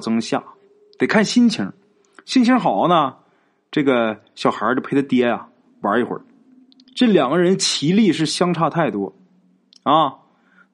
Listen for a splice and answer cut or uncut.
uncut